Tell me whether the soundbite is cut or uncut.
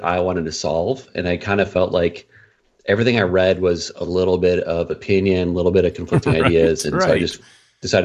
uncut